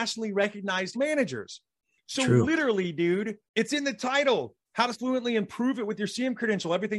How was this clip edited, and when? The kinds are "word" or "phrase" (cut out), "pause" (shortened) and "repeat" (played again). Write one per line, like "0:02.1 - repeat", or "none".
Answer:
0:00.9 - phrase
0:03.5 - pause
0:04.6 - pause
0:04.9 - phrase